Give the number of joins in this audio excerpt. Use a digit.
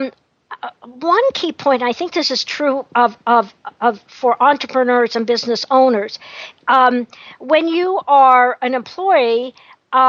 0